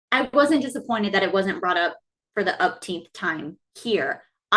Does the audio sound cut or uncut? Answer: uncut